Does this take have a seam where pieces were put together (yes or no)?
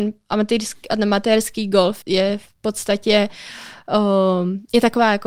yes